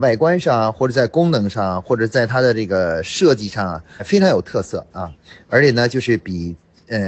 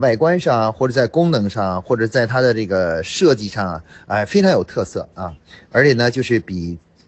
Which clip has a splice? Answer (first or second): first